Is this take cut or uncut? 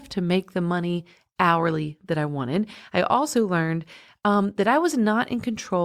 uncut